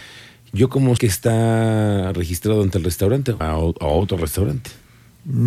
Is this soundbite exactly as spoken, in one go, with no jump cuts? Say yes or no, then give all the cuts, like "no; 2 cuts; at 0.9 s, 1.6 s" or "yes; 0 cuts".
no; 2 cuts; at 1.0 s, 3.4 s